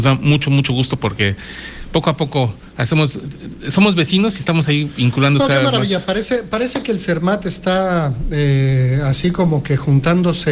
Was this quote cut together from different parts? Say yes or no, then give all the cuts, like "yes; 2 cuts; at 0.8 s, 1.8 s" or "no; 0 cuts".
no; 0 cuts